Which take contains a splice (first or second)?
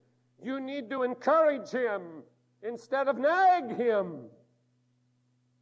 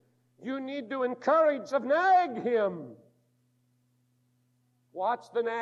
second